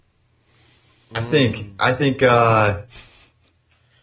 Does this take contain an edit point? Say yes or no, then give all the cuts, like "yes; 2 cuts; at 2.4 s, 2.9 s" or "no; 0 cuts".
no; 0 cuts